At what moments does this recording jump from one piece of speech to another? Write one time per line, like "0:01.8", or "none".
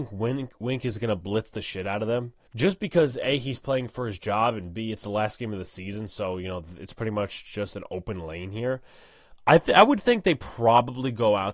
0:02.5